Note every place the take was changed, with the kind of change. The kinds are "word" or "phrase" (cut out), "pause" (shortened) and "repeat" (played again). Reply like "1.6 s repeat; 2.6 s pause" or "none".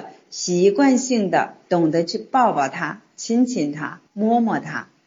4.1 s pause

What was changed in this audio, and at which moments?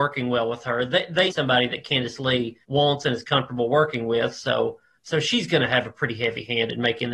1.3 s word; 2.6 s pause; 5.0 s word

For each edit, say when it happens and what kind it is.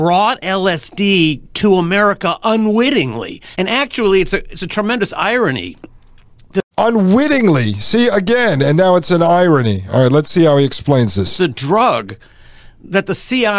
3.5 s pause; 6.7 s pause

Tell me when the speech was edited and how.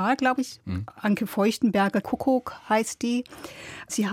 2.0 s word

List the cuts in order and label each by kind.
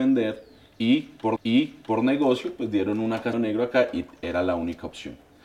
1.4 s repeat; 3.3 s phrase

